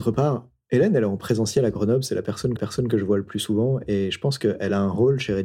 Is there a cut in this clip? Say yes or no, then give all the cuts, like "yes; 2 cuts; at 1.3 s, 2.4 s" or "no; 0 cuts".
yes; 1 cut; at 2.6 s